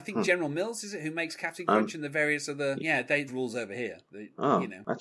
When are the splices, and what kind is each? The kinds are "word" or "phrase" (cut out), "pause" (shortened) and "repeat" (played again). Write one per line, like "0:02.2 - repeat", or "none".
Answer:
0:02.8 - word
0:03.3 - phrase